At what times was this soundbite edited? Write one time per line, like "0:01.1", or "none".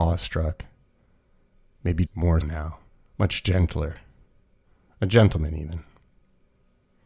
0:02.1
0:02.4
0:02.9